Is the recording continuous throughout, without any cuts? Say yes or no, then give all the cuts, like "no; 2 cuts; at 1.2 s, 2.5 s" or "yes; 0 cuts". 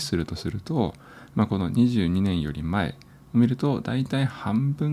yes; 0 cuts